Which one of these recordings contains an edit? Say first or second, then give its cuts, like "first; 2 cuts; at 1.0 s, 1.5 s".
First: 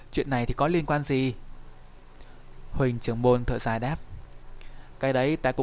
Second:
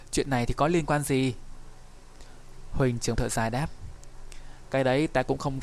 second; 1 cut; at 3.1 s